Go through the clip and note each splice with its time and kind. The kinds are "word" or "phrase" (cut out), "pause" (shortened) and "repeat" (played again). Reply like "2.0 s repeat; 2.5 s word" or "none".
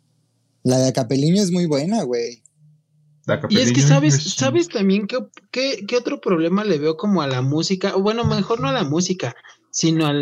none